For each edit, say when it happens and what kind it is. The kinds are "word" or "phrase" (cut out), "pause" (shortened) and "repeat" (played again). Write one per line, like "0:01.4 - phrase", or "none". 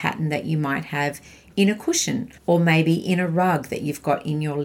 0:02.4 - pause